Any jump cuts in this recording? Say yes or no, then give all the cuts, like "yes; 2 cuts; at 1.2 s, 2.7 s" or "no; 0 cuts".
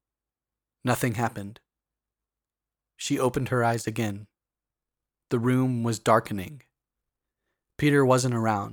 no; 0 cuts